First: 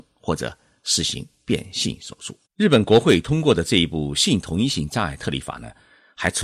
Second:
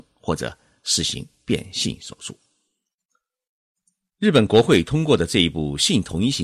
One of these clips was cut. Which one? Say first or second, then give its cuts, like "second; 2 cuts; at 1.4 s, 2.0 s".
first; 1 cut; at 2.5 s